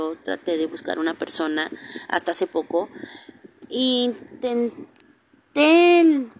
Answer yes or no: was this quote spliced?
no